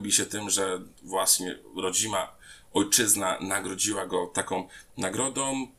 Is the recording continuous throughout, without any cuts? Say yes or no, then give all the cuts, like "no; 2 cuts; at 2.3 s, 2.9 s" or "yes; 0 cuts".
no; 1 cut; at 1.0 s